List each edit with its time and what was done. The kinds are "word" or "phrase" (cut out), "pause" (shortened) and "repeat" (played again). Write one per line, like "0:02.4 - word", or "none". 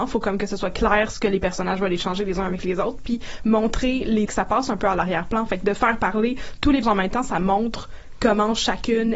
0:04.3 - word
0:06.8 - word

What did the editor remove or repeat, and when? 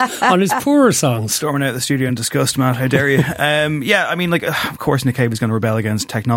0:02.1 - word

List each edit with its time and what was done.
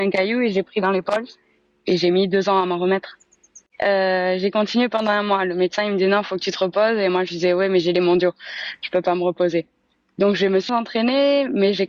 0:10.7 - word

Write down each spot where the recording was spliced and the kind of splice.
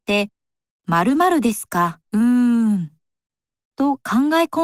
0:02.1 - pause

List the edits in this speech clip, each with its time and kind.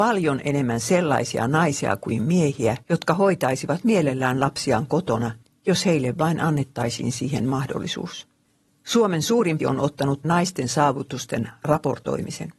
0:02.8 - pause
0:05.4 - pause
0:08.5 - pause
0:09.6 - word
0:10.2 - word

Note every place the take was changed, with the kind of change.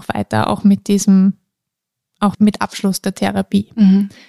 0:02.3 - word

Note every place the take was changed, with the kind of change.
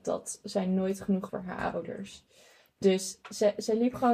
0:01.3 - word

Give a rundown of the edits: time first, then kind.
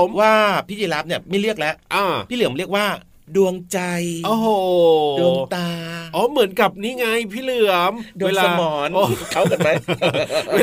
none

